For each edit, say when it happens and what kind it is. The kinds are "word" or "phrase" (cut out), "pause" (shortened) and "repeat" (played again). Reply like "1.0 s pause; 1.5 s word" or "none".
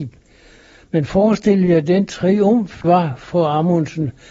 2.8 s word

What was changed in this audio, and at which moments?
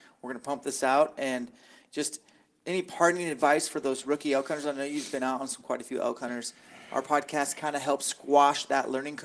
none

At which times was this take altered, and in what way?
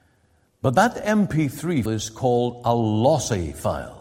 1.9 s word

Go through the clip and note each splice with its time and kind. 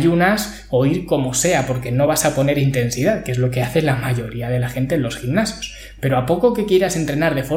none

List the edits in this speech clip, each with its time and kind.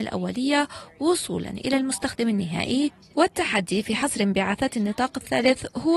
none

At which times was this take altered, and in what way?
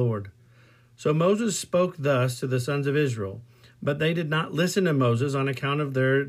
none

